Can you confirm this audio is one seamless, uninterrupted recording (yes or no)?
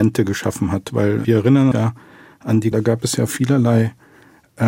no